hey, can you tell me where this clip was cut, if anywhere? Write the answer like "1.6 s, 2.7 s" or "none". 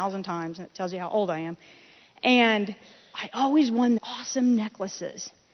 4.0 s